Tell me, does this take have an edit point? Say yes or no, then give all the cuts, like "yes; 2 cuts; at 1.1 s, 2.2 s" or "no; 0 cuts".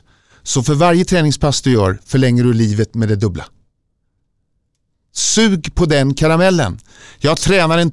no; 0 cuts